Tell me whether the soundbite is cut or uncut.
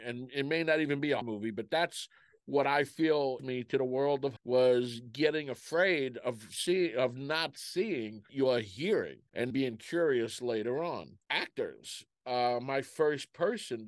cut